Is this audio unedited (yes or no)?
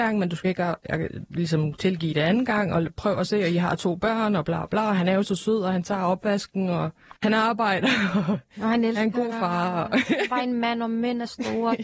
no